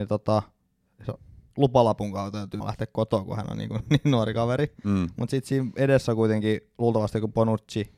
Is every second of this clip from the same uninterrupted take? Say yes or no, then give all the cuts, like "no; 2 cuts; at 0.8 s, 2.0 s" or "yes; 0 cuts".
no; 1 cut; at 2.6 s